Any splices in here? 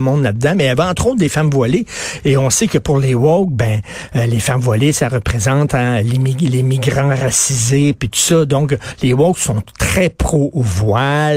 no; 0 cuts

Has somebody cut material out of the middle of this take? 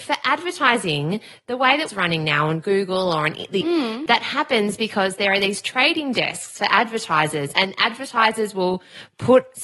yes; 2 cuts; at 1.9 s, 3.6 s

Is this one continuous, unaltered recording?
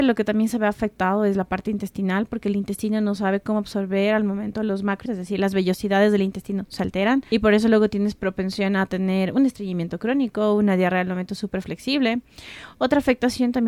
no; 1 cut; at 5.1 s

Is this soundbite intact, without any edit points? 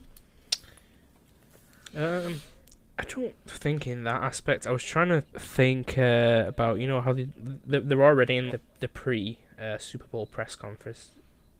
no; 2 cuts; at 5.3 s, 8.5 s

